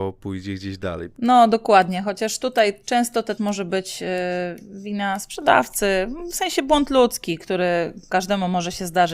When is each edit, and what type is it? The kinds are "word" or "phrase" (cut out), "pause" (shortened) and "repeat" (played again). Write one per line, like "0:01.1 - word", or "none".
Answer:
0:03.4 - word